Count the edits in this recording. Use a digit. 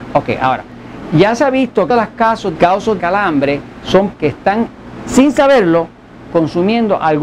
4